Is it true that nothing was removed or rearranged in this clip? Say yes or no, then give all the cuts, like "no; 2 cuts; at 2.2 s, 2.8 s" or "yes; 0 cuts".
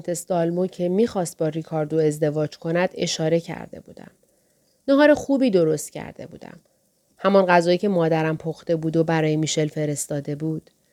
yes; 0 cuts